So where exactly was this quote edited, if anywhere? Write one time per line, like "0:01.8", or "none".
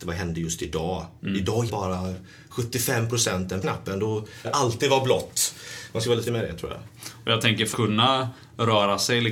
0:01.7
0:03.6
0:04.4
0:06.3
0:07.7